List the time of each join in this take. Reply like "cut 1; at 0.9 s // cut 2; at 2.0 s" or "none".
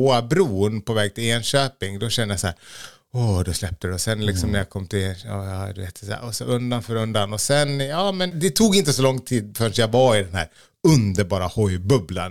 none